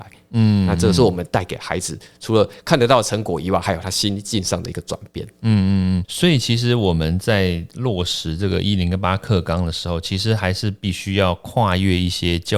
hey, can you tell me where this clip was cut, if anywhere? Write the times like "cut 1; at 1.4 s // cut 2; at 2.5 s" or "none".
none